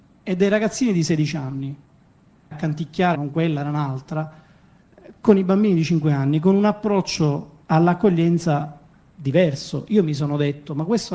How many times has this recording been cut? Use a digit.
3